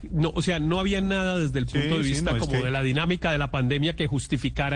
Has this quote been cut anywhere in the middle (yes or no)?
no